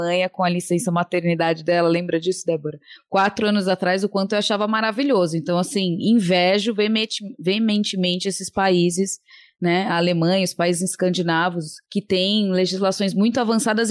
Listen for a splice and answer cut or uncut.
uncut